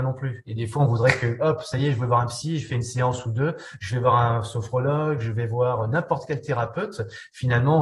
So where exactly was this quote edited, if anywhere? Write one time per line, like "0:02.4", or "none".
none